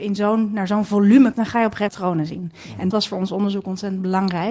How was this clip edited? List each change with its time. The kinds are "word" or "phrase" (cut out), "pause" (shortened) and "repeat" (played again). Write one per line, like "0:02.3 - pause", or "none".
0:01.3 - word
0:01.9 - word
0:02.9 - word